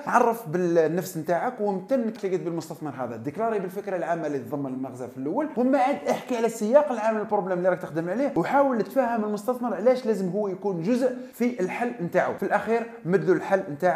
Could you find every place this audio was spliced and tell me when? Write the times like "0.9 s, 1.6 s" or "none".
2.2 s